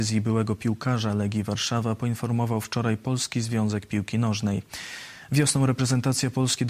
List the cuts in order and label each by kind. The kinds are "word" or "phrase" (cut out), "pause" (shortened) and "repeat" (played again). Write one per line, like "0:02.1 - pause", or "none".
none